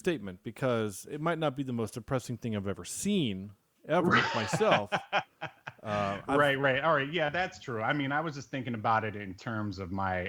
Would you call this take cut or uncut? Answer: uncut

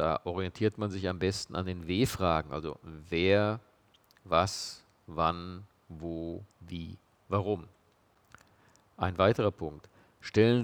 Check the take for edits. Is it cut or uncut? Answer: cut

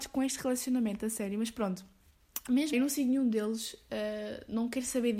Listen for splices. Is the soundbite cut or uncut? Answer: cut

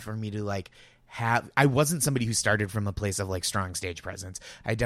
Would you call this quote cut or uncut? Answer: uncut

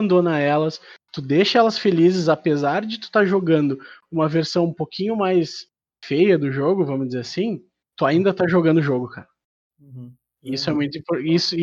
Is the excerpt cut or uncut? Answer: uncut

